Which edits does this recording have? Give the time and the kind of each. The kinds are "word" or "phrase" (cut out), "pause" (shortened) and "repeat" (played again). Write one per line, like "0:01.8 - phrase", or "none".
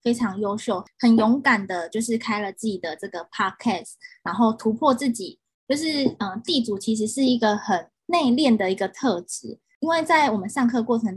0:08.0 - pause